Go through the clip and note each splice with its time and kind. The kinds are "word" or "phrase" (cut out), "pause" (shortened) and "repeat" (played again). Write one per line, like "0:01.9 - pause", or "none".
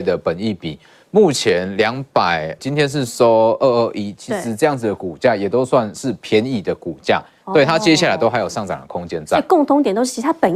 0:02.6 - word

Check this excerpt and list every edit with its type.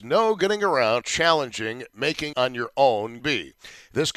0:01.0 - word
0:02.3 - word
0:03.2 - word

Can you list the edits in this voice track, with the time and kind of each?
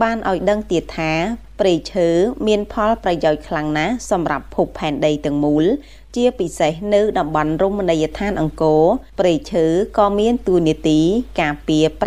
0:09.1 - pause

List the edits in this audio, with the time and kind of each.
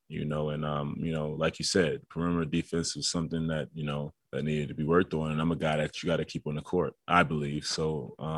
0:04.2 - pause
0:07.0 - pause

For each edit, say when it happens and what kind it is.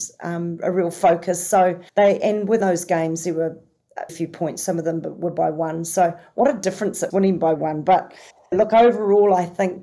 0:01.9 - pause
0:02.6 - phrase
0:04.1 - word
0:07.1 - word
0:07.6 - phrase
0:08.5 - word

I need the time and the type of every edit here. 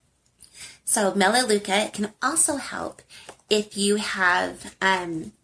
none

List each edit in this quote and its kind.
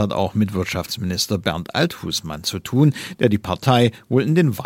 none

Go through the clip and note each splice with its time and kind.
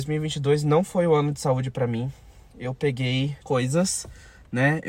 0:03.4 - word

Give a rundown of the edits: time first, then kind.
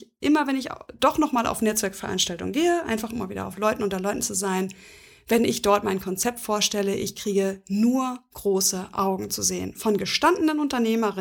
none

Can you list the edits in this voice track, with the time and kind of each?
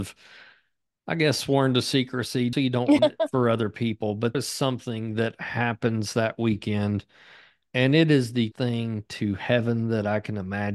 0:02.5 - word
0:03.0 - word
0:04.3 - word
0:08.5 - word

